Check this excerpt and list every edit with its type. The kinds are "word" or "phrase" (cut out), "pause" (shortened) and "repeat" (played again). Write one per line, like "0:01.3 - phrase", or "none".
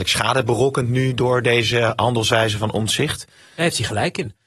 none